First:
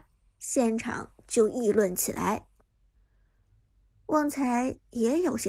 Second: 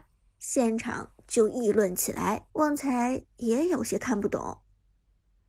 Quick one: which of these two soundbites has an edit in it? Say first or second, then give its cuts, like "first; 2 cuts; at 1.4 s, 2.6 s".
second; 1 cut; at 2.5 s